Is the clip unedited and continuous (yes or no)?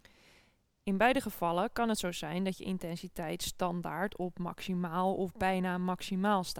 yes